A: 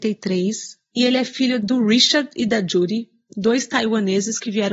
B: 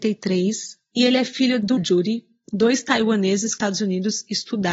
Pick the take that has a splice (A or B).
B